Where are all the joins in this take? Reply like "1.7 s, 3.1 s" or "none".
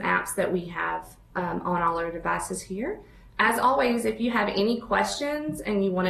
none